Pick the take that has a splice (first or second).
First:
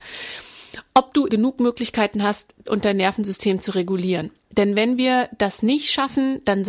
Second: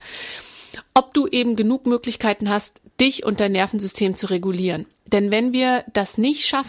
first